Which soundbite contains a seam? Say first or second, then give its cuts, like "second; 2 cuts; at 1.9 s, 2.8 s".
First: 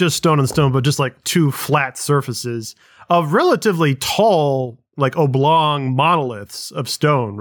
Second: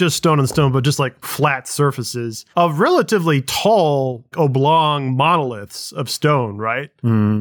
second; 3 cuts; at 1.2 s, 2.5 s, 4.3 s